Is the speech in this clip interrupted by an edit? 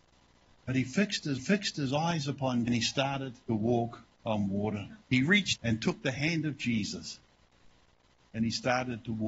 yes; 5 cuts; at 1.4 s, 2.7 s, 3.4 s, 5.0 s, 5.6 s

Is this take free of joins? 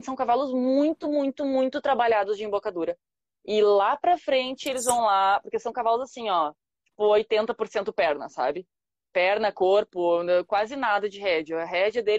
yes; 0 cuts

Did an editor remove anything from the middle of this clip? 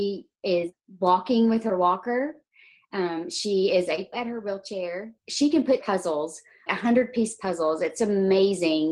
yes; 4 cuts; at 4.1 s, 5.2 s, 5.8 s, 6.7 s

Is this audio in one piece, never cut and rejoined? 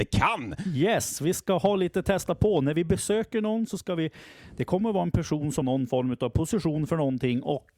no; 1 cut; at 5.6 s

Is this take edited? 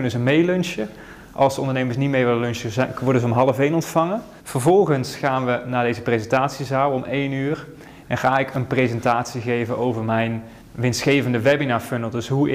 yes; 2 cuts; at 4.4 s, 10.6 s

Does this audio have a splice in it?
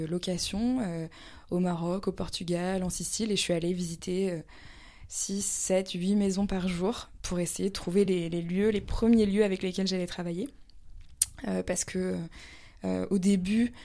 no; 0 cuts

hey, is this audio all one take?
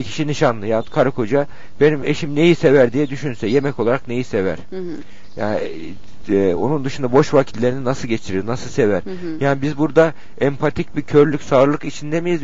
yes; 0 cuts

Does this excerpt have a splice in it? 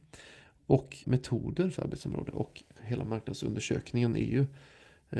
yes; 3 cuts; at 1.0 s, 1.8 s, 2.8 s

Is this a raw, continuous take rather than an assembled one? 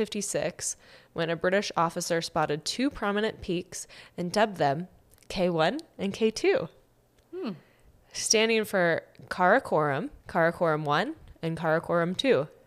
no; 1 cut; at 10.2 s

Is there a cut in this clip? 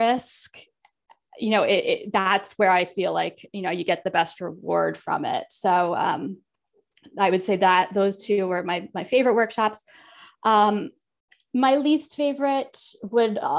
no; 0 cuts

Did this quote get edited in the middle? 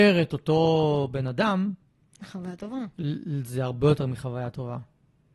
no; 0 cuts

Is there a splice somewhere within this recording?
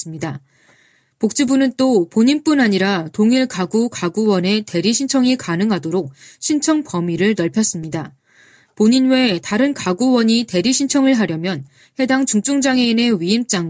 no; 0 cuts

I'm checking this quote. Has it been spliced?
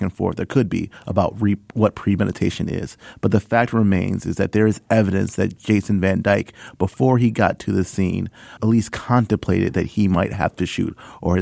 yes; 1 cut; at 8.6 s

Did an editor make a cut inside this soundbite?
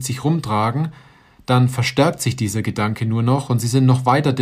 no; 0 cuts

